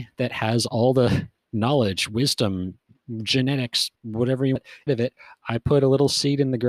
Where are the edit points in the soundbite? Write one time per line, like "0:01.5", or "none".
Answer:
0:04.0
0:04.6
0:04.9